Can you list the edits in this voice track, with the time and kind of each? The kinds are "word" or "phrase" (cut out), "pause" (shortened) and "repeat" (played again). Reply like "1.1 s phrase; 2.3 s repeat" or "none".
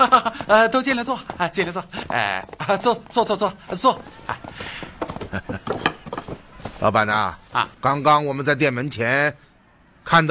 7.7 s pause